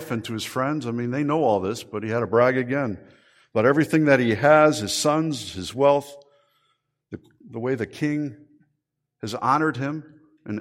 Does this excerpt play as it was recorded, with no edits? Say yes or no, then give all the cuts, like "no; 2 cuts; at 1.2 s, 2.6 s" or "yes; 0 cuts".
yes; 0 cuts